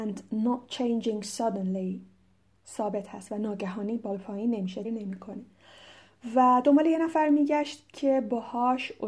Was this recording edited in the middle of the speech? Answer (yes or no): yes